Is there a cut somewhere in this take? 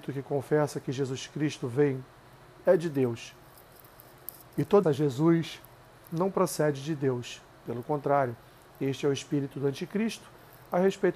yes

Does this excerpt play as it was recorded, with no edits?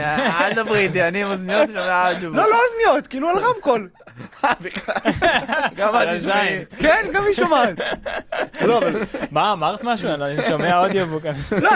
yes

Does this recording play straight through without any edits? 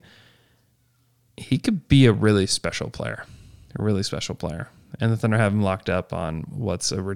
yes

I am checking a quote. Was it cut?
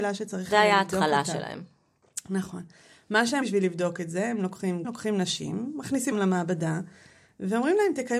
yes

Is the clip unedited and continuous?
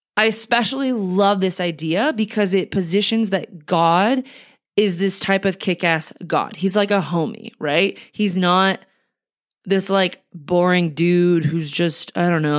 yes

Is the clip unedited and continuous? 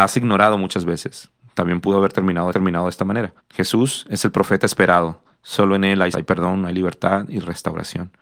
no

